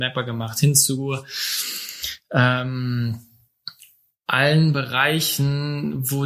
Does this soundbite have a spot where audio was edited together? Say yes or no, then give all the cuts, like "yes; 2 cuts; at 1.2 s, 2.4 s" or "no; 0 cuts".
no; 0 cuts